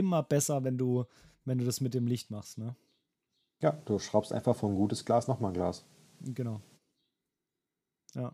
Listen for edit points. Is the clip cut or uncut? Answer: uncut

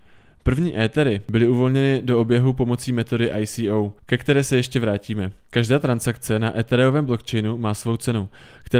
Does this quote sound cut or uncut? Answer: cut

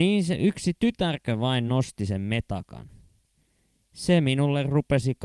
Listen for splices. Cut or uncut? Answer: uncut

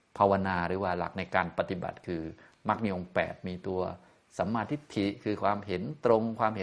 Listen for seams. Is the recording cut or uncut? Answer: uncut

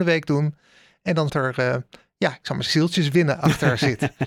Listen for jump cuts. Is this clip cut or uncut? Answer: cut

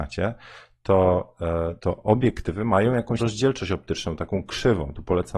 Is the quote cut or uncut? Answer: cut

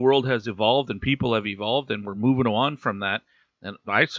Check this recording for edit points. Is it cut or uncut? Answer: uncut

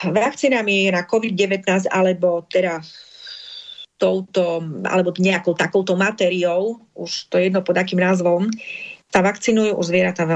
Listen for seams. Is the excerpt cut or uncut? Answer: cut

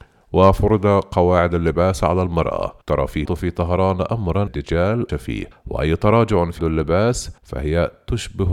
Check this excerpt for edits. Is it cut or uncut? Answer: cut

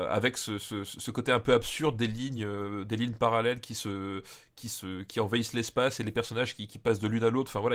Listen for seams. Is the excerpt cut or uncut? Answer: uncut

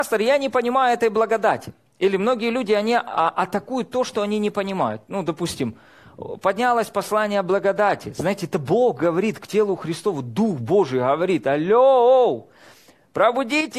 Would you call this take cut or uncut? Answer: cut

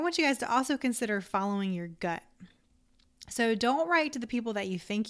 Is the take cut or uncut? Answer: uncut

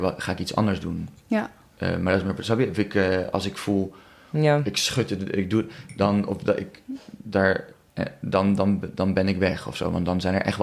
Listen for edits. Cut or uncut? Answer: uncut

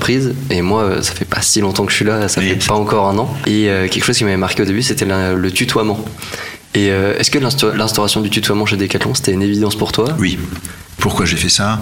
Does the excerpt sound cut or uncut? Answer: uncut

